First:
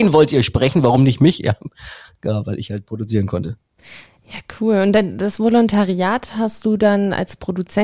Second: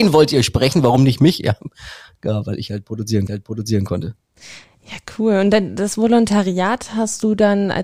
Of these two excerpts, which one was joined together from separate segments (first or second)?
second